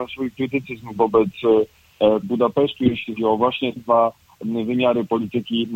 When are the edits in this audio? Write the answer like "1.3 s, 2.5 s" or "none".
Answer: 2.2 s, 3.2 s, 3.8 s

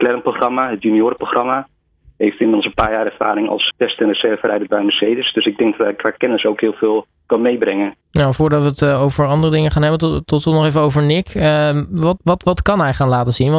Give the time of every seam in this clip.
3.7 s, 8.0 s, 12.2 s

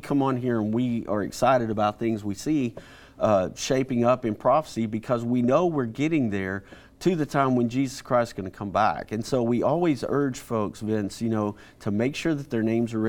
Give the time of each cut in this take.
none

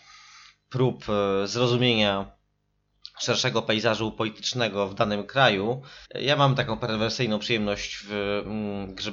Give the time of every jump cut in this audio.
6.0 s

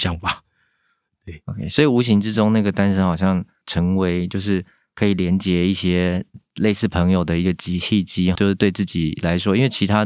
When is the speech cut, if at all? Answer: 8.4 s

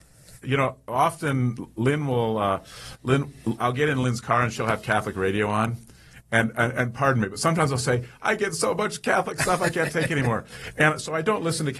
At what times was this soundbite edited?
none

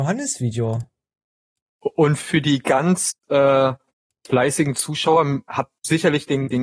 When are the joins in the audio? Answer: none

